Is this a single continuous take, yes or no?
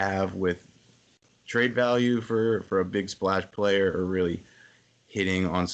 yes